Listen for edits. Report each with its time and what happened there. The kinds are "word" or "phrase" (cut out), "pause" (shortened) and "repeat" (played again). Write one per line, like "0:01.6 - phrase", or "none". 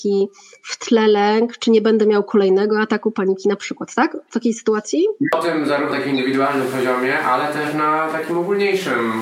0:05.9 - word